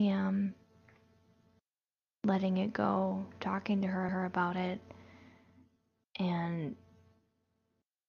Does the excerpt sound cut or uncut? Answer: cut